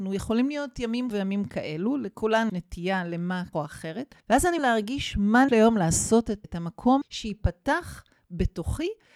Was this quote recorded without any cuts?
no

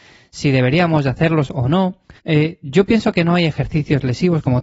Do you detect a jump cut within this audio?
yes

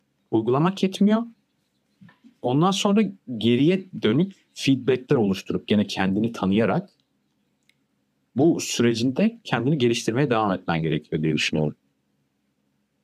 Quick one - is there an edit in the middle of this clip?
no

